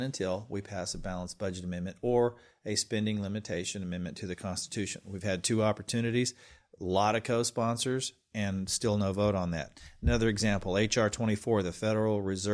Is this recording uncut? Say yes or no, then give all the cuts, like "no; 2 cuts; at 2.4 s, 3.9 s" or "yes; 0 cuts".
yes; 0 cuts